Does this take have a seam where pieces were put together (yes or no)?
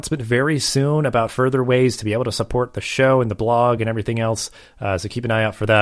no